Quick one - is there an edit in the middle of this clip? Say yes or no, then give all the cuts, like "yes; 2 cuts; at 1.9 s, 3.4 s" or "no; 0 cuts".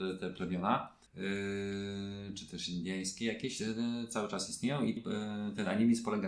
yes; 2 cuts; at 1.1 s, 5.0 s